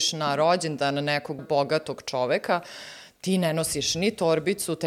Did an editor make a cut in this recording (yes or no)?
yes